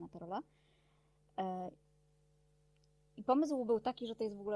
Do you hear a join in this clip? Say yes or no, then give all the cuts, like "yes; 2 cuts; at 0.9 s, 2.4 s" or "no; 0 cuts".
no; 0 cuts